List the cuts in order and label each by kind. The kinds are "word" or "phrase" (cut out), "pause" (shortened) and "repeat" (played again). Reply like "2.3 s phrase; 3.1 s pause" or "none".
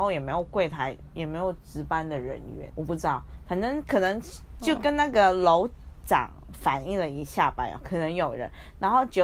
2.7 s word